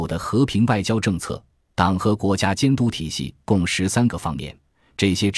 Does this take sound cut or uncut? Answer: uncut